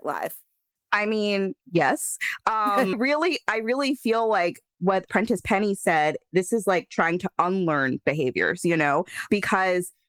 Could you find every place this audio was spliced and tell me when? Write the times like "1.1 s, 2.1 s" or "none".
1.6 s, 2.9 s, 4.7 s